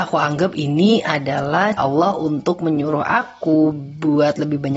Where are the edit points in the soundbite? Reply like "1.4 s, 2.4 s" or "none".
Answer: 1.8 s